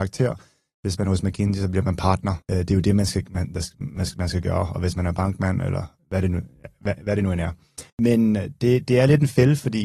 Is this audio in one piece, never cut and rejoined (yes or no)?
no